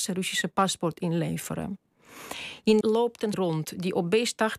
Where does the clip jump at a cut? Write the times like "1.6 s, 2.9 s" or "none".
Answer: 2.8 s, 3.3 s